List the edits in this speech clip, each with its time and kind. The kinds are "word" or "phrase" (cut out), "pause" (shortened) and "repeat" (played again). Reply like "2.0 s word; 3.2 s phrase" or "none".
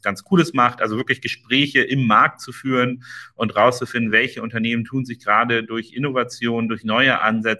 none